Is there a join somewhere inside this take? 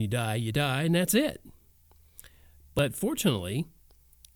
no; 0 cuts

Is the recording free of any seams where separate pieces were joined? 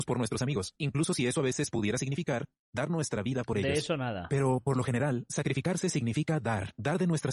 yes; 0 cuts

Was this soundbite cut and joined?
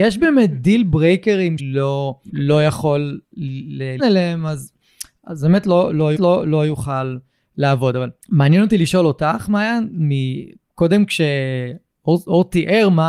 yes; 6 cuts; at 1.6 s, 2.3 s, 3.2 s, 4.0 s, 6.2 s, 8.2 s

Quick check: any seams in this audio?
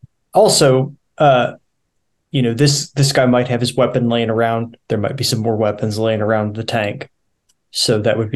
no; 0 cuts

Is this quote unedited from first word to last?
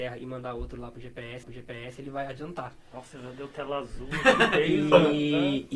no; 1 cut; at 1.4 s

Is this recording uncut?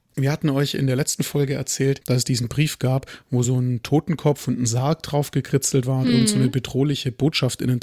yes; 0 cuts

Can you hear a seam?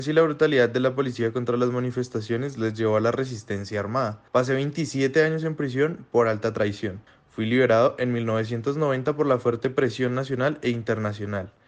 yes; 2 cuts; at 4.3 s, 7.1 s

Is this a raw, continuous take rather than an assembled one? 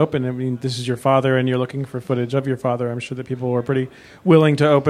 yes; 0 cuts

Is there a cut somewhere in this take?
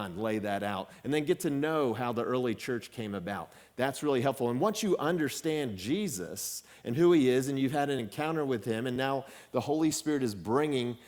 no; 0 cuts

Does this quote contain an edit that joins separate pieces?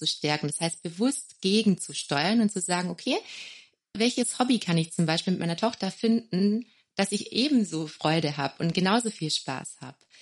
no; 0 cuts

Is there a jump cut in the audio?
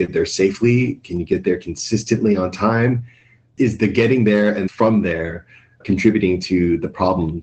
no; 0 cuts

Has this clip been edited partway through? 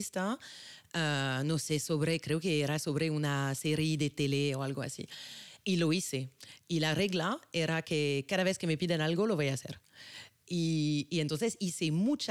no; 0 cuts

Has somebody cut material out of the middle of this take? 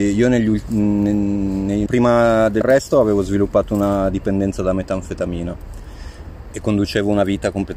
yes; 2 cuts; at 1.9 s, 2.6 s

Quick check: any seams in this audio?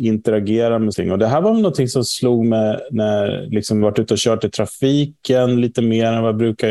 yes; 2 cuts; at 0.9 s, 3.8 s

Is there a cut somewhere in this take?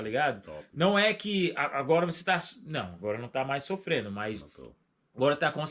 no; 0 cuts

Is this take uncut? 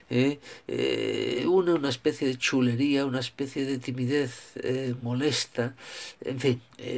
yes; 0 cuts

